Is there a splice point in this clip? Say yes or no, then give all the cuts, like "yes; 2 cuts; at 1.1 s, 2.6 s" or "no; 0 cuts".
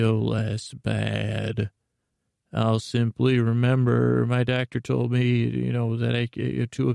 no; 0 cuts